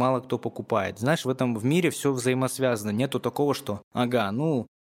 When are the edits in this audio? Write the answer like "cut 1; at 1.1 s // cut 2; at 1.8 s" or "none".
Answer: none

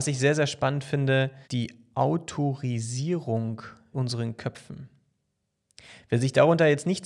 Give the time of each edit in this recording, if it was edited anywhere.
cut 1; at 1.4 s // cut 2; at 3.9 s

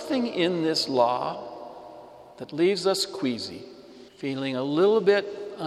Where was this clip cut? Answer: cut 1; at 2.3 s // cut 2; at 4.1 s

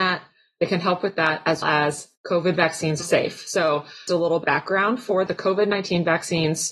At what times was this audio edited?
cut 1; at 1.6 s // cut 2; at 2.2 s // cut 3; at 3.0 s // cut 4; at 4.1 s // cut 5; at 4.4 s // cut 6; at 5.3 s

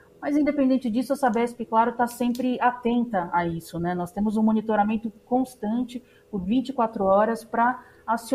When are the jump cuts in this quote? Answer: none

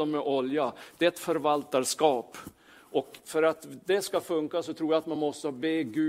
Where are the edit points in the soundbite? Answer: none

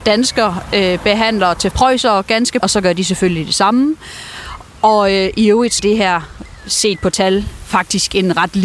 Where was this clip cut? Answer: cut 1; at 1.7 s // cut 2; at 2.6 s // cut 3; at 5.8 s

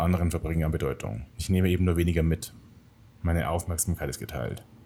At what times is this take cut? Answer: cut 1; at 1.3 s

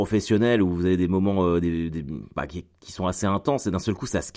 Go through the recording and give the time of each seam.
none

